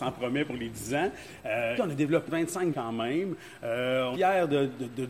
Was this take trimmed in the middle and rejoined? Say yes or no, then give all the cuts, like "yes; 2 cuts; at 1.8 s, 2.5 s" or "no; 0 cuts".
yes; 4 cuts; at 1.8 s, 2.3 s, 2.7 s, 4.1 s